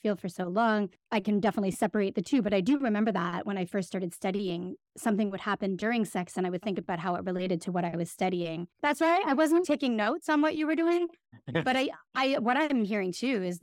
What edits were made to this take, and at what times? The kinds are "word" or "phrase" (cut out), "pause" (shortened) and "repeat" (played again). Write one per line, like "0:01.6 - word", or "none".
0:09.6 - word